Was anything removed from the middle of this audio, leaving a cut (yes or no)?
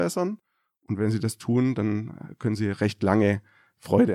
no